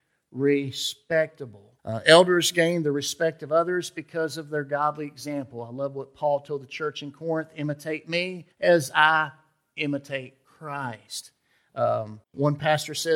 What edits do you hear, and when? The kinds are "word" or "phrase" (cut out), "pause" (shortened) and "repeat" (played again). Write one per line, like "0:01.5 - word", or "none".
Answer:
0:01.8 - pause
0:08.5 - pause
0:10.4 - pause
0:12.2 - pause